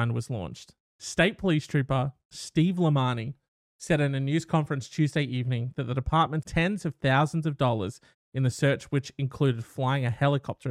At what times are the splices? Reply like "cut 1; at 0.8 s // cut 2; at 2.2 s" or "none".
cut 1; at 6.4 s